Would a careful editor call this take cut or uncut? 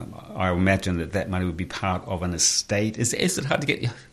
uncut